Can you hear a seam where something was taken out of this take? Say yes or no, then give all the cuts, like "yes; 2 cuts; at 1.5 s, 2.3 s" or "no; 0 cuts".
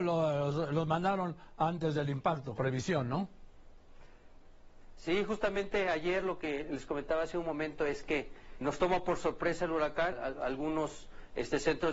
yes; 3 cuts; at 2.6 s, 8.6 s, 10.1 s